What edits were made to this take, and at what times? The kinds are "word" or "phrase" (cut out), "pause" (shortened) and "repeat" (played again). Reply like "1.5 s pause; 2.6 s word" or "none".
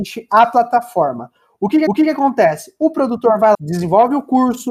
1.9 s repeat; 3.5 s word